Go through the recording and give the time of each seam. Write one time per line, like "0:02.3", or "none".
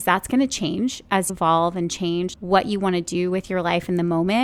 0:01.3
0:02.3